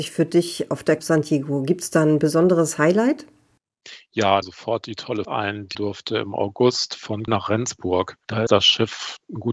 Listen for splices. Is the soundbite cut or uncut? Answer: cut